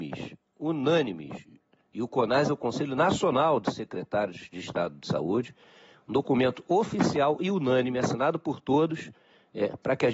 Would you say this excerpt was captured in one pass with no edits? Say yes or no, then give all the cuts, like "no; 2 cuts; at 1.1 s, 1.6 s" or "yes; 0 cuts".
yes; 0 cuts